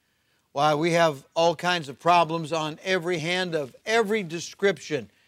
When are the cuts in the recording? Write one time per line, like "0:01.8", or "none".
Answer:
none